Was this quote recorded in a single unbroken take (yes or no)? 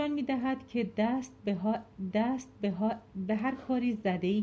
no